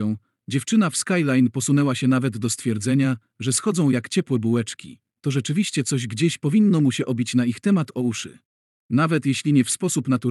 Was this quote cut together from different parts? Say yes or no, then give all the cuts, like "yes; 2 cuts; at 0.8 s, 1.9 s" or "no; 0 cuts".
yes; 1 cut; at 8.5 s